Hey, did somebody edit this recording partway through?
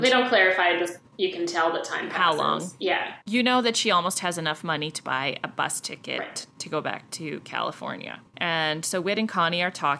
yes; 2 cuts; at 1.1 s, 3.2 s

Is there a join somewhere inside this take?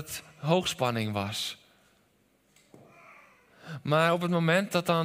no; 0 cuts

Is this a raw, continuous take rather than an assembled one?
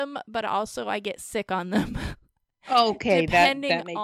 yes; 0 cuts

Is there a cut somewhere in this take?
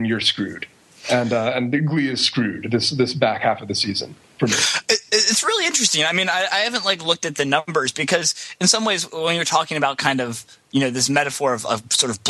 no; 0 cuts

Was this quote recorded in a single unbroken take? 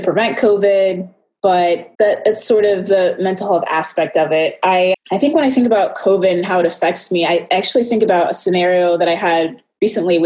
no; 2 cuts; at 1.9 s, 4.9 s

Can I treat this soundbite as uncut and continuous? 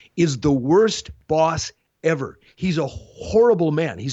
yes; 0 cuts

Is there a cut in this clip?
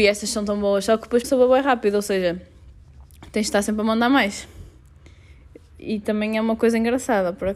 yes; 1 cut; at 1.2 s

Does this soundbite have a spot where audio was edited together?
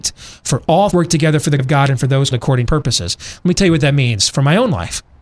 yes; 4 cuts; at 0.9 s, 1.6 s, 2.3 s, 2.7 s

